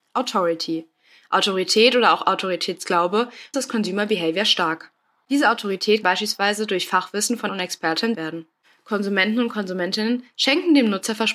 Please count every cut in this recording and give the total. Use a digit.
4